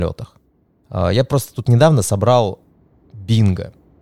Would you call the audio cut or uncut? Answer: uncut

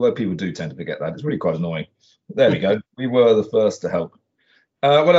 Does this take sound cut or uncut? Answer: uncut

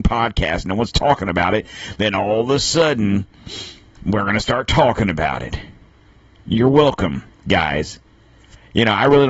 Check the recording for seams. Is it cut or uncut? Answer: uncut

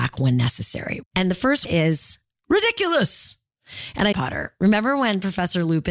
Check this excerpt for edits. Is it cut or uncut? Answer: cut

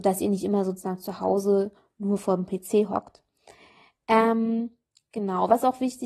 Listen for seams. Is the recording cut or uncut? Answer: uncut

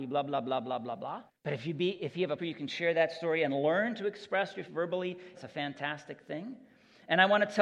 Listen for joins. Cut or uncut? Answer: cut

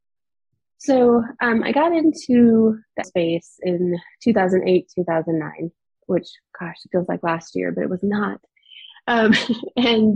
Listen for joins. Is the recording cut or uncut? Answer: cut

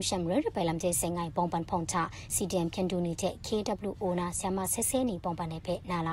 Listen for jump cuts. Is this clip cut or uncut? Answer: uncut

